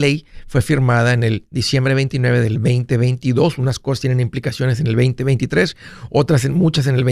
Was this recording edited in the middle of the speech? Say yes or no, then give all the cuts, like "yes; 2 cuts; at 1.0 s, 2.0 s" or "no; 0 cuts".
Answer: no; 0 cuts